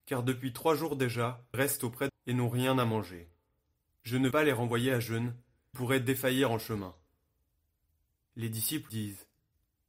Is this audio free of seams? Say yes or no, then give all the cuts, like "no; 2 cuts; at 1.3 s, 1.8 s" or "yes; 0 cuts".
no; 5 cuts; at 1.5 s, 2.1 s, 4.3 s, 5.7 s, 8.9 s